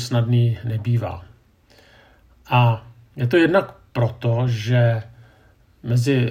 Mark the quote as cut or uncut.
uncut